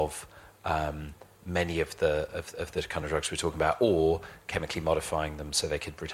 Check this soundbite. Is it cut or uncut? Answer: uncut